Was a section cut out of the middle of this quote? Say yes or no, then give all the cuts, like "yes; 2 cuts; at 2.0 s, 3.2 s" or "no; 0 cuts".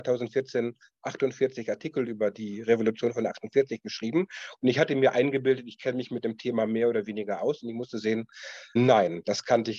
yes; 1 cut; at 8.8 s